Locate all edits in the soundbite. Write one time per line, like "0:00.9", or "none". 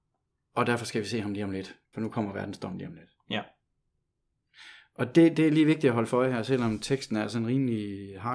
0:01.8